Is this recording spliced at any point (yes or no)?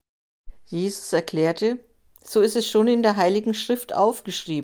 no